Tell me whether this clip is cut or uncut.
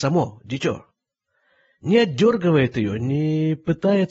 uncut